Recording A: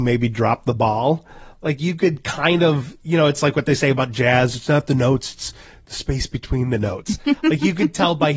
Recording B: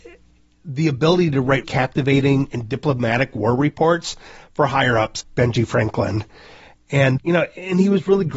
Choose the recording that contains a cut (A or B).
B